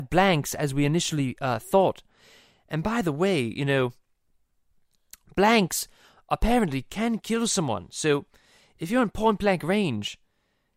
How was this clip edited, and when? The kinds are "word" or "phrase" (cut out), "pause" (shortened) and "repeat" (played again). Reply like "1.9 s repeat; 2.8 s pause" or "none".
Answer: none